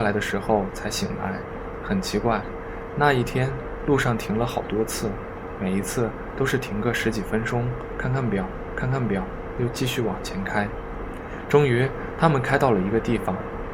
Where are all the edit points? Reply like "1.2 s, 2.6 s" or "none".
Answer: 8.8 s